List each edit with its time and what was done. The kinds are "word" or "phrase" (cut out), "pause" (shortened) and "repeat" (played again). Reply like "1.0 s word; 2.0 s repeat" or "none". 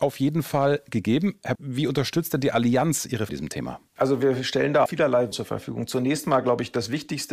1.6 s word; 3.3 s phrase; 3.9 s pause; 4.9 s word; 5.3 s phrase